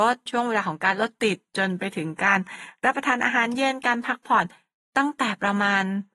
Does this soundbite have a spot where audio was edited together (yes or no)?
no